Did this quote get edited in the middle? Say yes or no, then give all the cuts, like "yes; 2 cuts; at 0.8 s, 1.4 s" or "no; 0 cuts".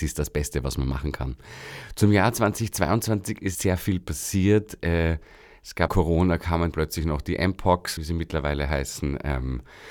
yes; 4 cuts; at 3.5 s, 5.9 s, 6.7 s, 8.0 s